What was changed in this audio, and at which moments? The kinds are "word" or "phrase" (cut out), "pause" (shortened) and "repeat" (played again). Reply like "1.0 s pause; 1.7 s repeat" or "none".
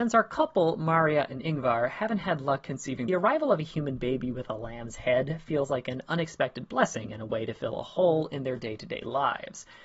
3.1 s phrase